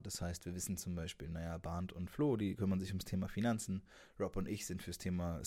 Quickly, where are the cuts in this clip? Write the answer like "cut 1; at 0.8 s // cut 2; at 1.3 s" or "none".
none